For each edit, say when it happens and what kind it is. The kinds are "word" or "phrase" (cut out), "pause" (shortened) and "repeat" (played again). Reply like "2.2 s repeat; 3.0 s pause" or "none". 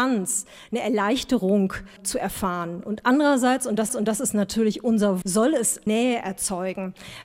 3.9 s repeat; 5.2 s word; 5.9 s word